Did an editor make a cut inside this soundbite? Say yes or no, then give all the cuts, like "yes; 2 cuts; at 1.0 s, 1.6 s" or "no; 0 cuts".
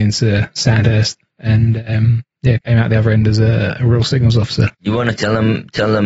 yes; 1 cut; at 4.7 s